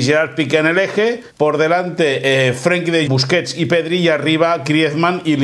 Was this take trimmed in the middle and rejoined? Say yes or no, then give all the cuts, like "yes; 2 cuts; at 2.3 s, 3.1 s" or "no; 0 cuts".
yes; 2 cuts; at 1.3 s, 3.1 s